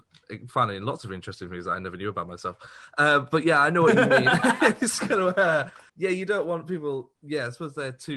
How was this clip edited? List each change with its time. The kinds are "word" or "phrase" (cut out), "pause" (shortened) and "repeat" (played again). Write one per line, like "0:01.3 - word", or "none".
0:05.9 - pause